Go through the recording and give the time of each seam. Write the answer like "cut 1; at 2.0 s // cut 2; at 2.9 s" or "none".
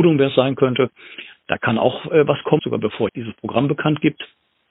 cut 1; at 2.6 s // cut 2; at 3.1 s